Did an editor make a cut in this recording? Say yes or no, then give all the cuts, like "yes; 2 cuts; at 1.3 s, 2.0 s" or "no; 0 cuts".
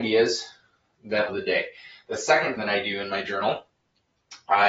yes; 2 cuts; at 1.3 s, 2.6 s